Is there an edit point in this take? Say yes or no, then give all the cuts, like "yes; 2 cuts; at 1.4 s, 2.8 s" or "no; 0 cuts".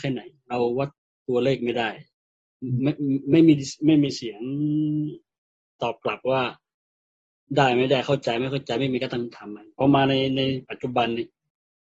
no; 0 cuts